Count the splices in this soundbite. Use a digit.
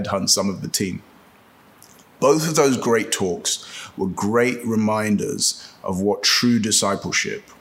0